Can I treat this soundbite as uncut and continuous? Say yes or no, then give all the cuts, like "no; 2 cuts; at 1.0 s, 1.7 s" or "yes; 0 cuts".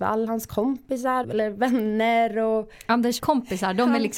no; 2 cuts; at 1.2 s, 3.2 s